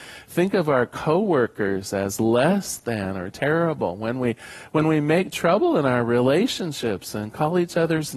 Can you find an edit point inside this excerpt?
no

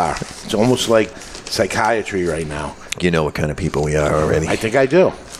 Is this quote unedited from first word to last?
no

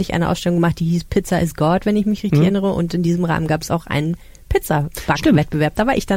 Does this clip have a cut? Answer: no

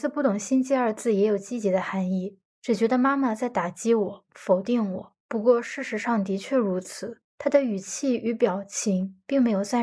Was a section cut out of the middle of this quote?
yes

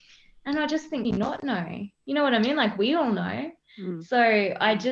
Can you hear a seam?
yes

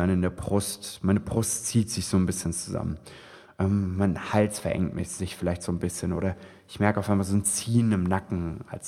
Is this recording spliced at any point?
no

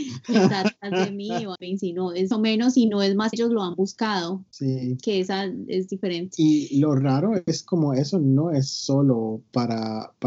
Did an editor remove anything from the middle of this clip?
yes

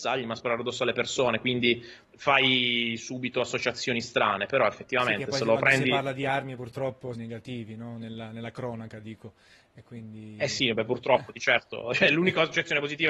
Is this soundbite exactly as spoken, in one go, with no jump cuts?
no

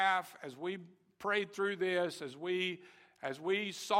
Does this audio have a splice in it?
no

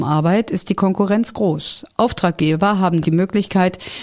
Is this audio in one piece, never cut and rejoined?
no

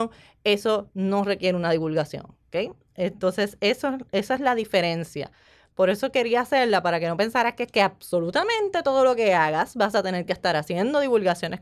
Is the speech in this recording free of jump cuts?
yes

